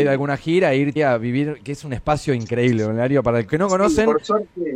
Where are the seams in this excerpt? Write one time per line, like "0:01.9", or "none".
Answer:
0:01.0
0:03.5